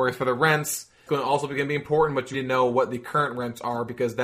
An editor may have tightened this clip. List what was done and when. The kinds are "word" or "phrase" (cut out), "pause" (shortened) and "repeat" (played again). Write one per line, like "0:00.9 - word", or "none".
0:01.1 - word
0:02.3 - word